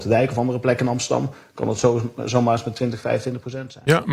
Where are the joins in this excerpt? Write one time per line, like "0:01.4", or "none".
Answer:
none